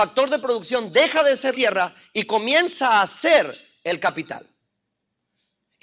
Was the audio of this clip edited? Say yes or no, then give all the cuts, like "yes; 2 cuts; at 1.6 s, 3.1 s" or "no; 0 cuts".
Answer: yes; 1 cut; at 1.5 s